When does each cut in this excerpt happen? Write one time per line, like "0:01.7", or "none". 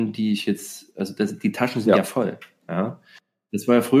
none